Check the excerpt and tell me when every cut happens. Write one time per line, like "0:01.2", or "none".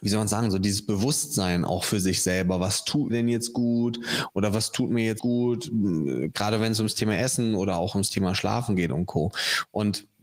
0:03.1
0:05.2